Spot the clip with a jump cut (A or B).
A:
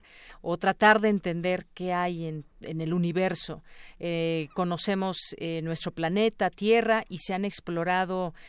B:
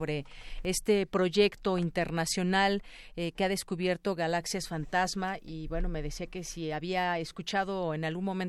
A